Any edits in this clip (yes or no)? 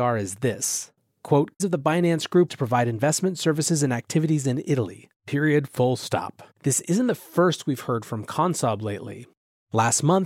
yes